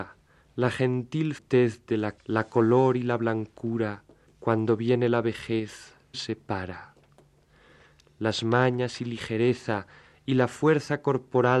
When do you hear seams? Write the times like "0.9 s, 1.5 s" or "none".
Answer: 1.4 s, 2.2 s, 4.3 s, 6.1 s